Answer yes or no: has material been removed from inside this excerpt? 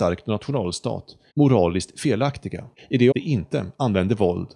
yes